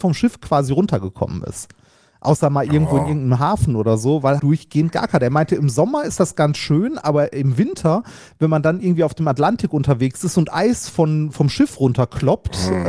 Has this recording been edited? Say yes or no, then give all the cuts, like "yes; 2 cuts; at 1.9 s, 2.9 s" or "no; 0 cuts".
yes; 1 cut; at 4.4 s